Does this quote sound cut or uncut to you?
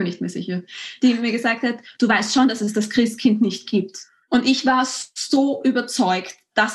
cut